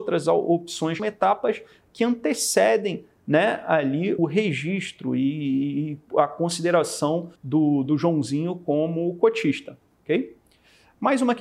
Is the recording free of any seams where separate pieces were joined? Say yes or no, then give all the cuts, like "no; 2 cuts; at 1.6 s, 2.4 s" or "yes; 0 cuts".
no; 3 cuts; at 1.0 s, 4.2 s, 7.4 s